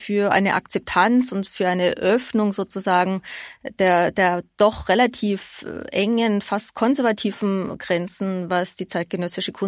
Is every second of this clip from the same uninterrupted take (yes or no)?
yes